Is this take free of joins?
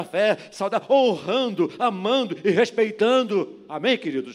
yes; 0 cuts

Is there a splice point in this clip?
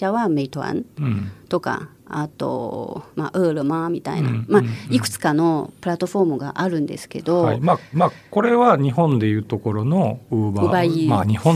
yes; 2 cuts; at 3.1 s, 7.9 s

